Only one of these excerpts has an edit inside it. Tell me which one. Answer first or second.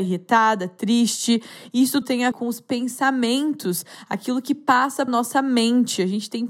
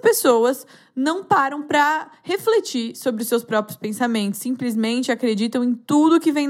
first